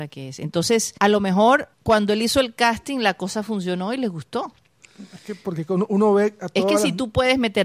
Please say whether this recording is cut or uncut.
cut